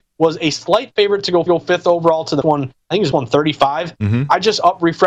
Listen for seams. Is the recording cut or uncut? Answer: cut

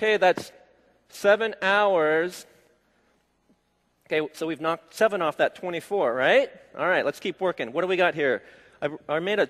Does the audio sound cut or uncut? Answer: uncut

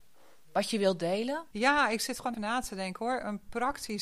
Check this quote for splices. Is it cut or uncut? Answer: cut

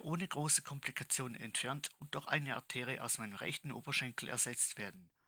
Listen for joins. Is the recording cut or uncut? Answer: uncut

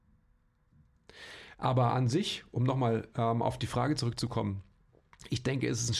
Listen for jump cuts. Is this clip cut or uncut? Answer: uncut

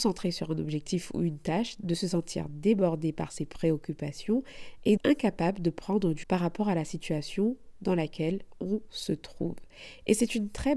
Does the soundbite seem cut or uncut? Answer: cut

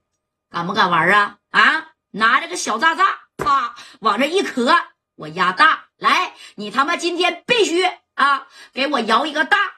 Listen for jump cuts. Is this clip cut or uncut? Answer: uncut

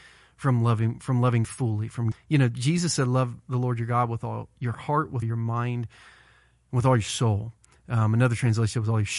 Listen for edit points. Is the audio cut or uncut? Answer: cut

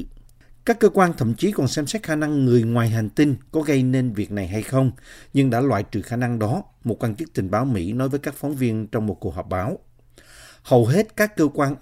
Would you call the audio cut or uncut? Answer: uncut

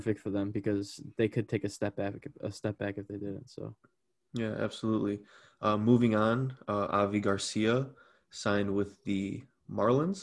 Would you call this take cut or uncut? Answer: uncut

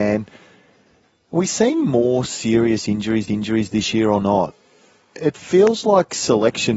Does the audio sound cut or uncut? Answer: cut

